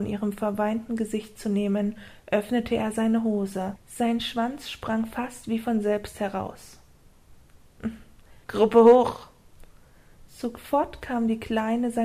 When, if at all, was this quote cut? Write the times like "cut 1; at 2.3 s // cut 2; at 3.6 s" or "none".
cut 1; at 8.4 s